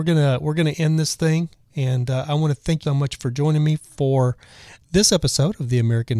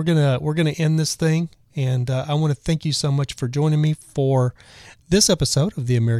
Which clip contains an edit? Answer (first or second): first